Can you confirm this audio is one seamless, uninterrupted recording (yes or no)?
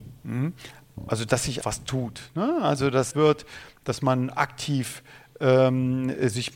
no